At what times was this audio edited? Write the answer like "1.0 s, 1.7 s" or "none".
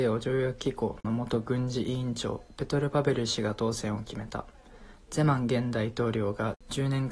1.0 s